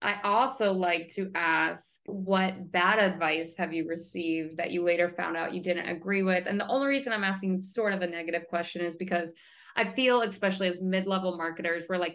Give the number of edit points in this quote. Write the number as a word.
zero